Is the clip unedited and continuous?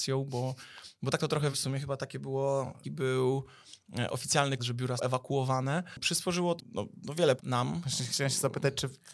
no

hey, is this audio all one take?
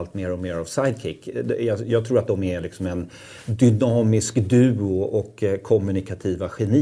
yes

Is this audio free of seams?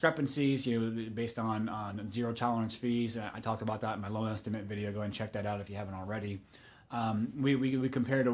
yes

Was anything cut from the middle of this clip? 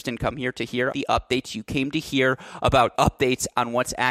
yes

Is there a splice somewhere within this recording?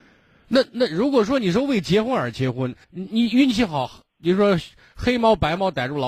yes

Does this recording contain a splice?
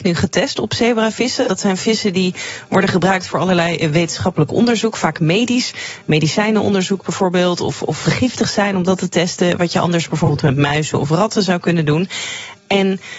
yes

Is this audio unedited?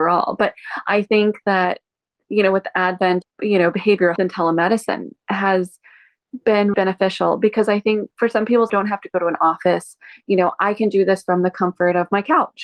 no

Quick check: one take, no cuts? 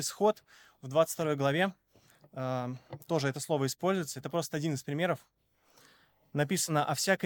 yes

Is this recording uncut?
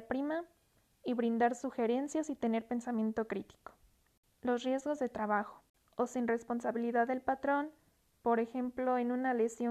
yes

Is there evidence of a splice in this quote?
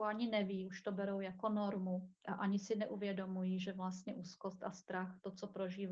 yes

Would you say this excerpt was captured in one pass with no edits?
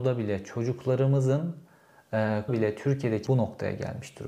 no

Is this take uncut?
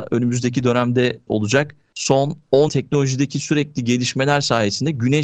no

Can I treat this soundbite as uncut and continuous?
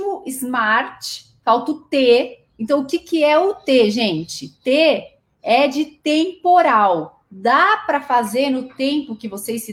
no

